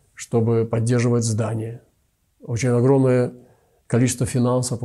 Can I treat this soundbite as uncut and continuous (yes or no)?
yes